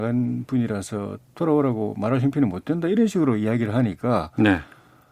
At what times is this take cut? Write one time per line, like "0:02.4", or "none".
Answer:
none